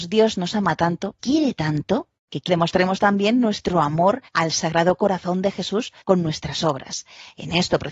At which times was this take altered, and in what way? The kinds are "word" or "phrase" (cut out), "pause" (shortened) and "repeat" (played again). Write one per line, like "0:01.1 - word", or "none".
0:01.2 - word
0:02.2 - pause
0:02.5 - phrase
0:04.3 - pause
0:06.0 - pause